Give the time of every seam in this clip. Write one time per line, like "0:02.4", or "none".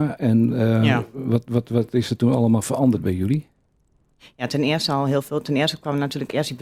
none